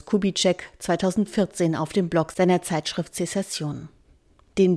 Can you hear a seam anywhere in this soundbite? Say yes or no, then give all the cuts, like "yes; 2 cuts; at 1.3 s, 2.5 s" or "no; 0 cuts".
no; 0 cuts